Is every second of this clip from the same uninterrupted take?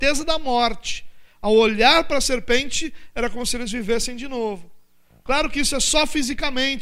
yes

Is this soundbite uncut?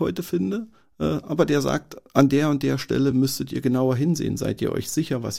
yes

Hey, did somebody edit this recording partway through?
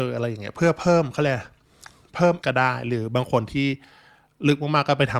yes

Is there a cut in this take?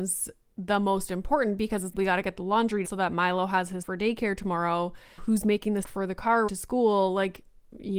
yes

